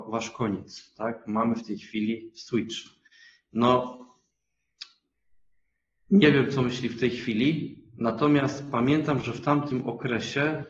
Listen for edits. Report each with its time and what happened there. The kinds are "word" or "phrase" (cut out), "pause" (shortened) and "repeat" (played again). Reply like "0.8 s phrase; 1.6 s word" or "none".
none